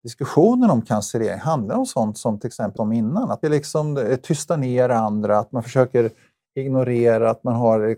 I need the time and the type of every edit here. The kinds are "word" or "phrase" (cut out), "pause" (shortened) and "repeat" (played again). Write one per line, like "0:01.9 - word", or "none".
0:02.8 - phrase
0:03.4 - phrase